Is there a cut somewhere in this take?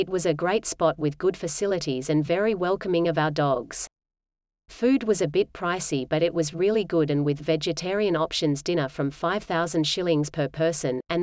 no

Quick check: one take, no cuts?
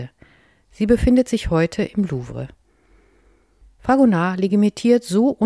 yes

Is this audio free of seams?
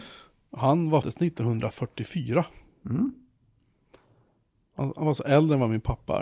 no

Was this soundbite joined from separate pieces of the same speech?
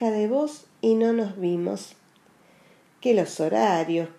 no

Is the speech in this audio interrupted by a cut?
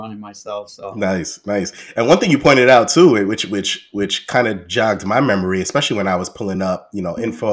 no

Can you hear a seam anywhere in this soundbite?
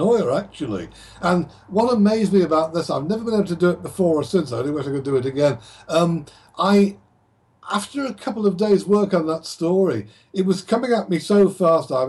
no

